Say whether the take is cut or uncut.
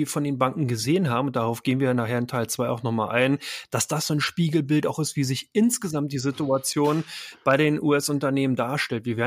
uncut